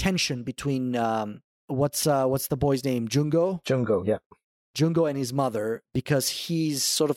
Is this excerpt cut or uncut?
uncut